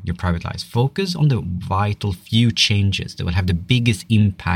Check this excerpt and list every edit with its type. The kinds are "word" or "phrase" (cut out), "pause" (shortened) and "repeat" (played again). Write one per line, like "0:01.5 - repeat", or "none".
none

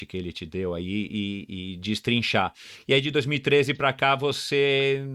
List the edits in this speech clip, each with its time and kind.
none

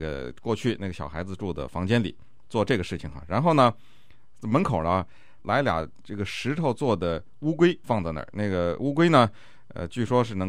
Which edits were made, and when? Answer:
0:07.8 - word

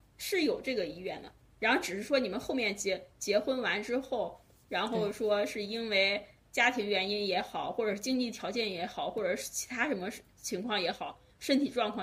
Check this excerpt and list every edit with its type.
none

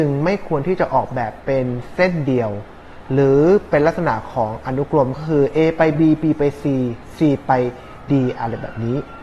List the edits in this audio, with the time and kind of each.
none

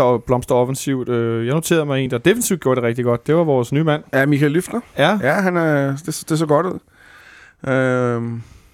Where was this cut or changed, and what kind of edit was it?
none

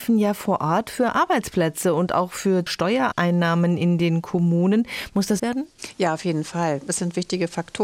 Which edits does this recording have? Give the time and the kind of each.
0:02.7 - word
0:05.4 - phrase

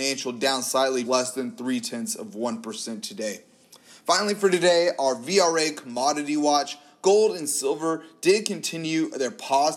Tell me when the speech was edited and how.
0:01.0 - word

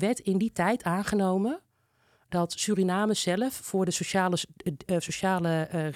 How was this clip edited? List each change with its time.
none

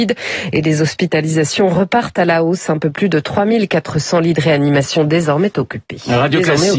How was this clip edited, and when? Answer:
0:05.0 - word

